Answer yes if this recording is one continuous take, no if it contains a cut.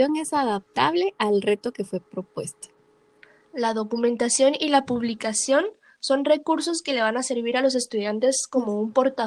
yes